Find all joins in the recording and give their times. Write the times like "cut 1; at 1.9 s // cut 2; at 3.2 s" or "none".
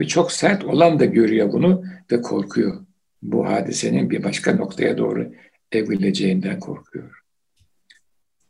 cut 1; at 3.1 s

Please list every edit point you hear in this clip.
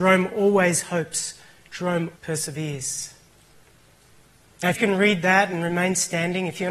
cut 1; at 2.2 s // cut 2; at 4.8 s

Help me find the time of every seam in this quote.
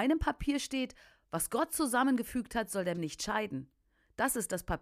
cut 1; at 2.9 s

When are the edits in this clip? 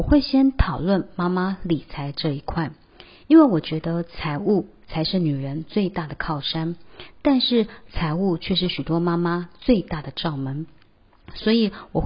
none

